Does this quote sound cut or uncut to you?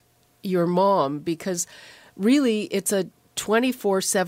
uncut